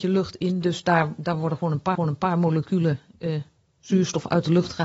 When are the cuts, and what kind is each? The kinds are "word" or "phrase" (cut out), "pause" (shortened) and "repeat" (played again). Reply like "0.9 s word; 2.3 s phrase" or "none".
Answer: 1.9 s repeat